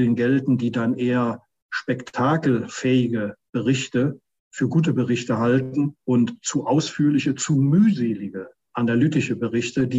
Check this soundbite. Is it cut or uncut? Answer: uncut